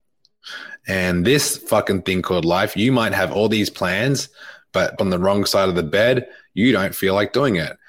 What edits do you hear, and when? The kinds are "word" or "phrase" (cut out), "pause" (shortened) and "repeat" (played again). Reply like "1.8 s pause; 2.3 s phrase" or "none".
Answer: 5.0 s phrase